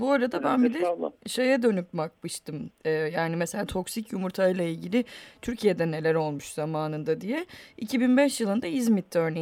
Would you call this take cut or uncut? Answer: uncut